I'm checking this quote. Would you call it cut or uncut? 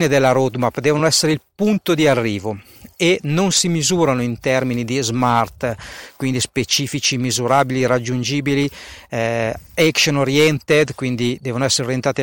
uncut